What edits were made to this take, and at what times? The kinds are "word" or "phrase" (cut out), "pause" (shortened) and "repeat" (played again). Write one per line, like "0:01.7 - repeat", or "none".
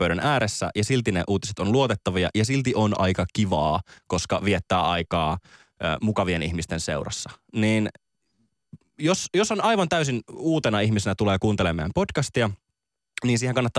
none